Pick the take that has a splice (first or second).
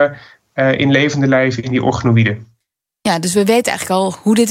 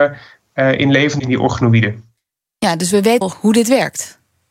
second